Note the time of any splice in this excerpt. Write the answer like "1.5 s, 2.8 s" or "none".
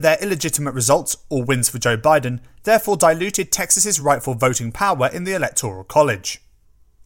none